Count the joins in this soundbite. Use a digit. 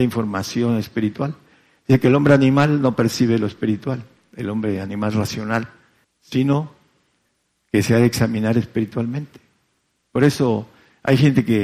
1